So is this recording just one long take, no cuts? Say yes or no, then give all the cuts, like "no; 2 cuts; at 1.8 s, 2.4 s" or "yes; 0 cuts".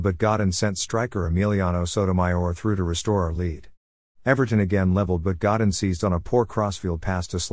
yes; 0 cuts